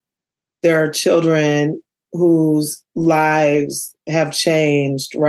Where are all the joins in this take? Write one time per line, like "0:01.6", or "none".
none